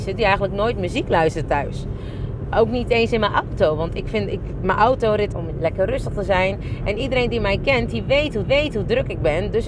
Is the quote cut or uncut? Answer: cut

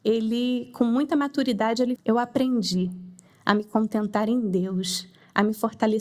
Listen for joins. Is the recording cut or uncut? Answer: cut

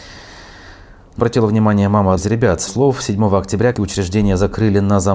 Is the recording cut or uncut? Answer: cut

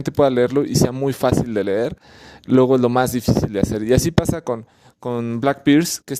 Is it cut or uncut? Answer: uncut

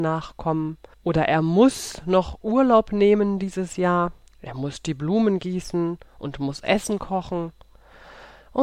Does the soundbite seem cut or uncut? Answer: cut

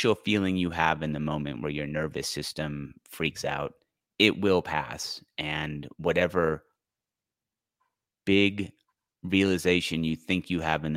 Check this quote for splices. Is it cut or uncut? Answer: uncut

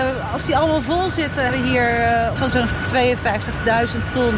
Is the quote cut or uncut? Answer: cut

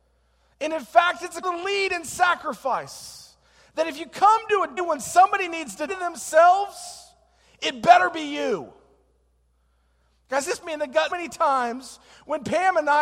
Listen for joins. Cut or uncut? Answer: cut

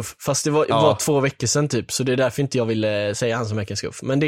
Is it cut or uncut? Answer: uncut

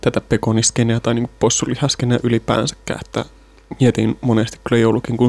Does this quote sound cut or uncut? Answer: uncut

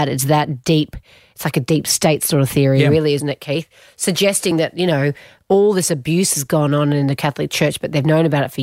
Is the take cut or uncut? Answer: uncut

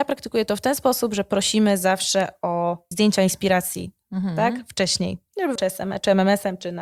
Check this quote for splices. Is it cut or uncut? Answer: cut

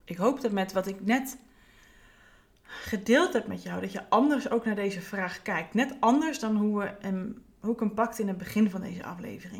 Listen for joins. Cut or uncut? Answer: uncut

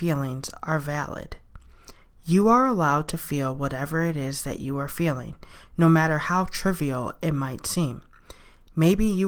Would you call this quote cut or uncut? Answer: uncut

